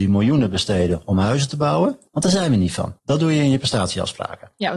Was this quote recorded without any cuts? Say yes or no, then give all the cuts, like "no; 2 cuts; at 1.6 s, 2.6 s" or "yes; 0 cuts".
no; 2 cuts; at 2.1 s, 3.0 s